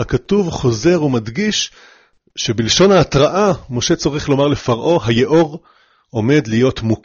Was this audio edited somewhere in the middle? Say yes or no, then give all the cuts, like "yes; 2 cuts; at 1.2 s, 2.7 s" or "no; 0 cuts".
no; 0 cuts